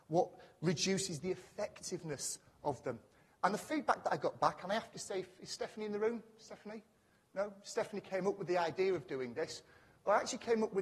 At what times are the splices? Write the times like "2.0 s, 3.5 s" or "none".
none